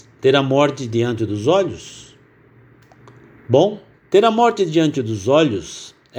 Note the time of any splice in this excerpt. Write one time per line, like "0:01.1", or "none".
0:03.9